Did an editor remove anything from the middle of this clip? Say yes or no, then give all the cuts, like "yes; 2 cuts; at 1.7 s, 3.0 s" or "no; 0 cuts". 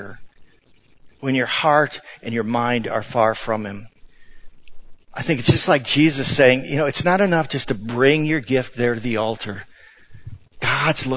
no; 0 cuts